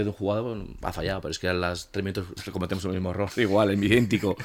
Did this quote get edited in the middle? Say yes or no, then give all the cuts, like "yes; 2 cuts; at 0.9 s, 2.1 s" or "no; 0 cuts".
no; 0 cuts